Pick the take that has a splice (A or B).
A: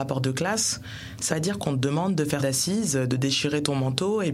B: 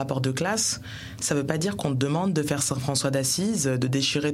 A